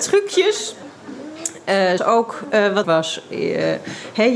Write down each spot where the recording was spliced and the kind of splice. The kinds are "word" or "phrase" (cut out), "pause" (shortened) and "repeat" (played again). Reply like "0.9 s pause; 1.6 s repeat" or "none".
2.0 s word; 2.8 s word